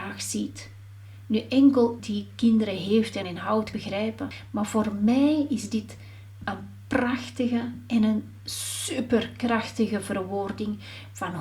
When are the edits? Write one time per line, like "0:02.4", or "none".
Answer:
0:02.0
0:03.2
0:03.7